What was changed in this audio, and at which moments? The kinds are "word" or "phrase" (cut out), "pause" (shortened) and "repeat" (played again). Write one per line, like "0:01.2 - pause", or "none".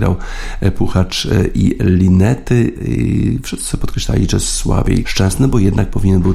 0:05.0 - word